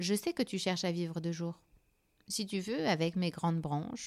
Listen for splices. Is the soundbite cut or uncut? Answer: uncut